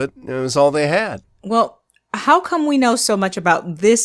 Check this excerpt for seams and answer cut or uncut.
uncut